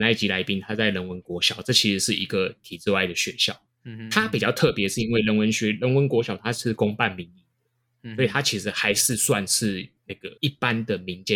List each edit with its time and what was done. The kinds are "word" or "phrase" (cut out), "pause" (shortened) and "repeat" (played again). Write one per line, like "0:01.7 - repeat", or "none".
0:10.4 - pause